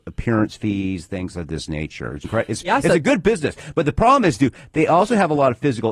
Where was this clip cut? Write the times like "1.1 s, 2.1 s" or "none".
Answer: 2.2 s